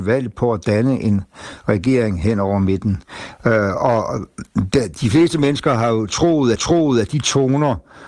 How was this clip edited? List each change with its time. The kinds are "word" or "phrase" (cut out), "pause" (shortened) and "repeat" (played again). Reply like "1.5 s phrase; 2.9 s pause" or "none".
6.6 s repeat